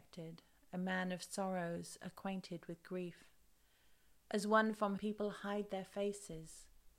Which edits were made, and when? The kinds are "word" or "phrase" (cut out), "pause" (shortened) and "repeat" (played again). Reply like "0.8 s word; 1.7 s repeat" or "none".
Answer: 5.0 s word